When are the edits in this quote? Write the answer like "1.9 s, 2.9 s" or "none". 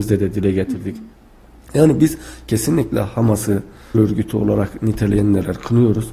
3.9 s

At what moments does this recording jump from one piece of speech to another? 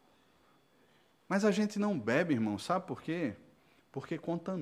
none

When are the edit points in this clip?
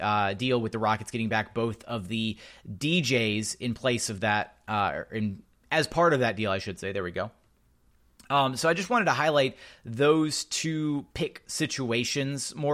none

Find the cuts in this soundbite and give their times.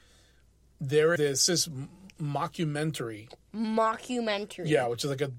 1.2 s, 1.5 s, 2.1 s

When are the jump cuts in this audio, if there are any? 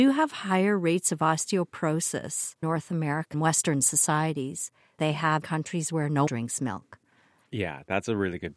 2.6 s, 3.3 s, 5.0 s, 5.4 s, 6.3 s

